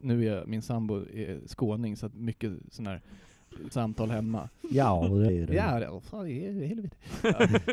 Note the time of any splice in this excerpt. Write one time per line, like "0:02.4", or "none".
0:02.1
0:03.7
0:05.3